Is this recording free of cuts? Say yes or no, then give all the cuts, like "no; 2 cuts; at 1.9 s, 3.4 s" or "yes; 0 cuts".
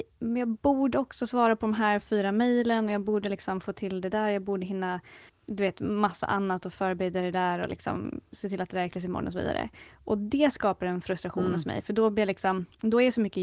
no; 2 cuts; at 5.3 s, 8.9 s